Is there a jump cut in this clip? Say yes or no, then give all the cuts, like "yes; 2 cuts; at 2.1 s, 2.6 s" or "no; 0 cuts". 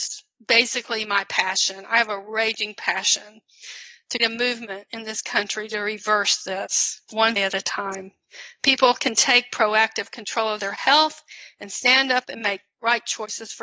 yes; 2 cuts; at 4.2 s, 7.4 s